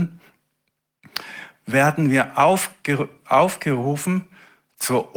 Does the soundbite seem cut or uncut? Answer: uncut